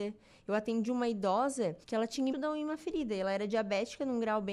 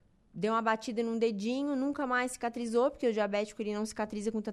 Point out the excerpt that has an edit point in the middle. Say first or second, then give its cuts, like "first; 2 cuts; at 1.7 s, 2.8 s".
first; 2 cuts; at 1.8 s, 2.3 s